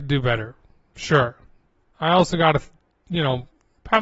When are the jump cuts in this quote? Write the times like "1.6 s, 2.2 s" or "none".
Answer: 1.8 s